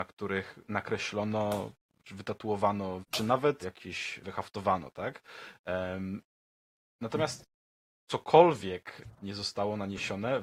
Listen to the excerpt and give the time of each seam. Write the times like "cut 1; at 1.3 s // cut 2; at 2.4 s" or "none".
cut 1; at 3.0 s // cut 2; at 3.6 s // cut 3; at 4.2 s // cut 4; at 9.2 s